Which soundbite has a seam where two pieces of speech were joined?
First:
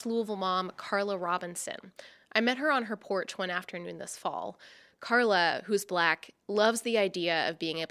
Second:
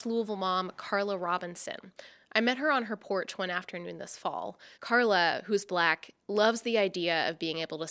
second; 1 cut; at 4.7 s

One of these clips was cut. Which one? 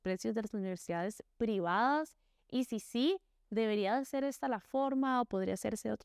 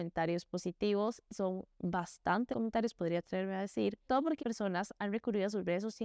second; 5 cuts; at 1.3 s, 2.5 s, 2.9 s, 4.1 s, 4.4 s

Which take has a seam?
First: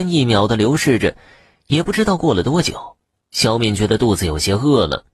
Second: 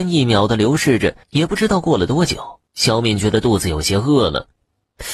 second; 2 cuts; at 1.2 s, 2.7 s

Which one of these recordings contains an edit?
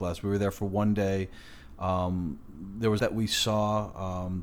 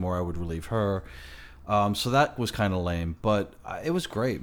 first; 1 cut; at 3.0 s

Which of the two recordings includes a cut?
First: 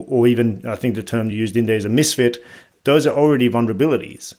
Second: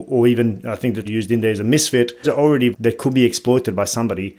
second; 3 cuts; at 1.0 s, 2.2 s, 2.7 s

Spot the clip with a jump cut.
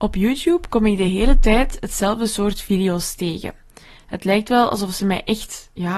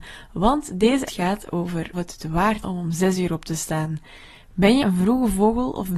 second; 4 cuts; at 1.1 s, 1.9 s, 2.6 s, 4.8 s

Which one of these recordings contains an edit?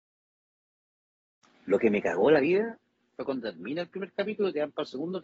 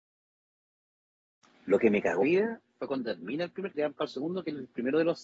second; 3 cuts; at 2.2 s, 2.7 s, 3.7 s

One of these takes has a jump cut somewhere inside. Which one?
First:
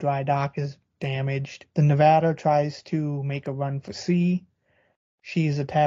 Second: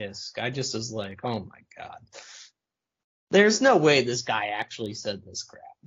first; 1 cut; at 1.7 s

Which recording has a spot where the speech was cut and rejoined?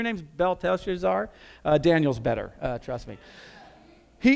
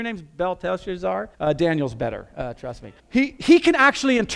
second; 2 cuts; at 1.3 s, 3.0 s

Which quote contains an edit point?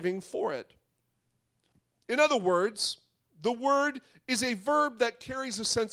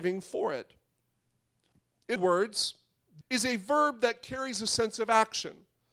second; 2 cuts; at 2.2 s, 3.2 s

